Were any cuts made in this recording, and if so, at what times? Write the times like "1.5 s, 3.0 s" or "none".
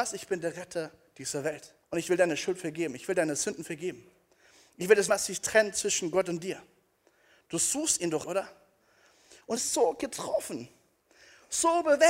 1.8 s, 5.1 s, 8.2 s, 9.6 s

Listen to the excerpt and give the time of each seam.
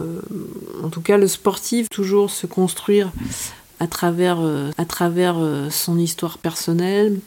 1.9 s, 4.7 s

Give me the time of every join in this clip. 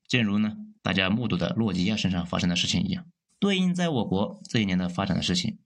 3.3 s

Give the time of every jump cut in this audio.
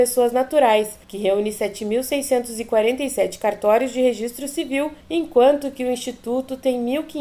1.0 s, 5.0 s

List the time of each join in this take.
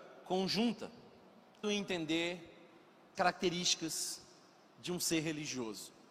1.6 s, 3.1 s

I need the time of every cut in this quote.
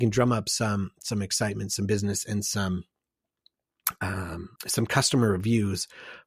4.6 s

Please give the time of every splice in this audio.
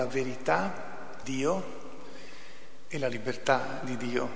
1.2 s

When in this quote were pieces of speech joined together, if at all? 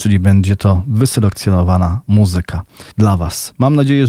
2.9 s

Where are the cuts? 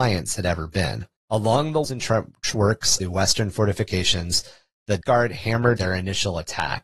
1.2 s, 1.8 s, 3.0 s, 5.0 s, 5.8 s

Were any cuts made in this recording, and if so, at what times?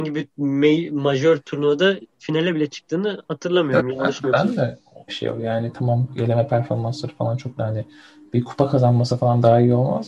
5.1 s, 7.6 s

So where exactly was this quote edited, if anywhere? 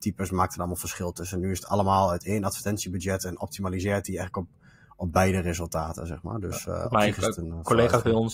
none

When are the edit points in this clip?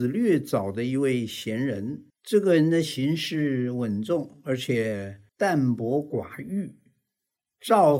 2.1 s, 5.3 s

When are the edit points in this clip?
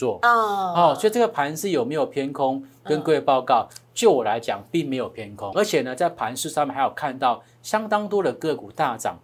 5.5 s

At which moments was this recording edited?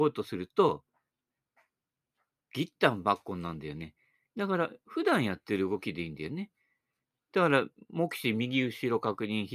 none

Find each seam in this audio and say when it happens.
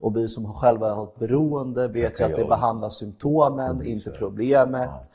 none

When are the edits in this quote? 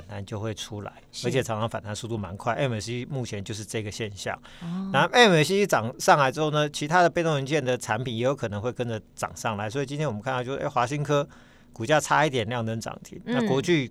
none

